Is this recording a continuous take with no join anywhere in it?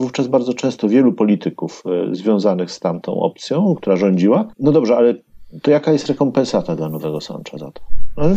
no; 1 cut; at 4.5 s

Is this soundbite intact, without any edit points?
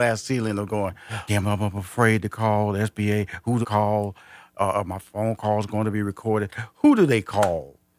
no; 2 cuts; at 1.3 s, 3.6 s

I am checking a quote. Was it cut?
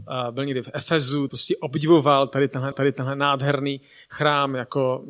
yes; 2 cuts; at 1.3 s, 2.7 s

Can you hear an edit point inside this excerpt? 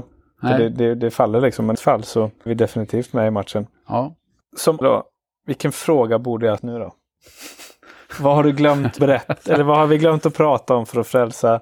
yes; 5 cuts; at 1.7 s, 2.5 s, 4.8 s, 6.6 s, 9.0 s

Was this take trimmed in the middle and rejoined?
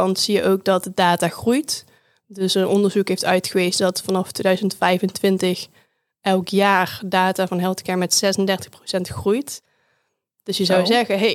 no; 0 cuts

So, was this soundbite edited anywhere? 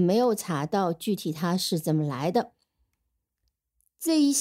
no; 0 cuts

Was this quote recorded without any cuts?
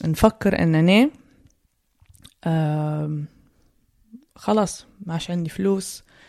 yes; 0 cuts

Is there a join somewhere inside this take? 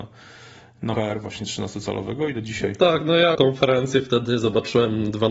yes; 2 cuts; at 0.9 s, 3.3 s

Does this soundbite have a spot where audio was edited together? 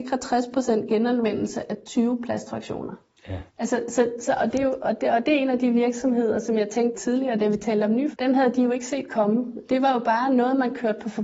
yes; 3 cuts; at 3.5 s, 6.9 s, 8.1 s

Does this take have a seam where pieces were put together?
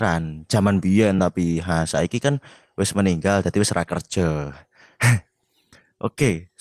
no; 0 cuts

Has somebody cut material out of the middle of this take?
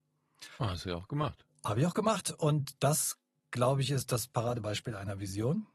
no; 0 cuts

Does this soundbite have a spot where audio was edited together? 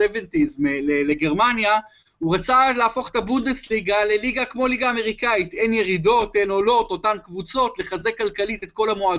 no; 0 cuts

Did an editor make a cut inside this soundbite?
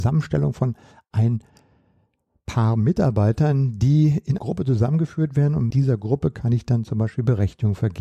yes; 2 cuts; at 4.4 s, 5.7 s

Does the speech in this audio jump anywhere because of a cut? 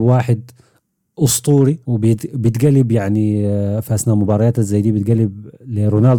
yes; 1 cut; at 1.8 s

